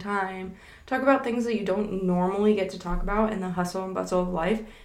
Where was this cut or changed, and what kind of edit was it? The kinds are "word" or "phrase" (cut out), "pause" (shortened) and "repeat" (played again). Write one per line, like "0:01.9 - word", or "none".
none